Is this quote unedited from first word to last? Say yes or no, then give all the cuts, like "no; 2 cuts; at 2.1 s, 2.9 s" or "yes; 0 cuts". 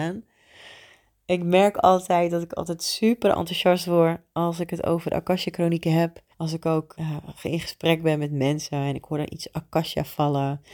no; 2 cuts; at 6.3 s, 6.9 s